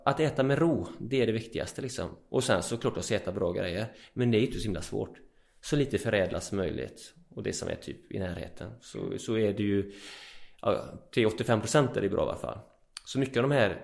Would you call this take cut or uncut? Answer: uncut